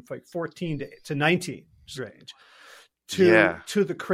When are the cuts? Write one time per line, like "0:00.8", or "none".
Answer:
0:02.0